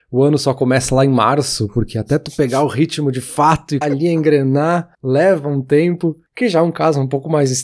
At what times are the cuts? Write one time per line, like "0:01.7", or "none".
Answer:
0:03.8
0:04.9
0:06.3